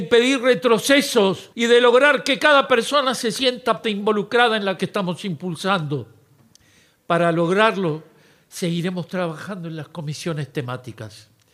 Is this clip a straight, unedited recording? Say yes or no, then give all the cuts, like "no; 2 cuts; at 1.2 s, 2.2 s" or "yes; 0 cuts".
no; 3 cuts; at 1.5 s, 3.8 s, 4.8 s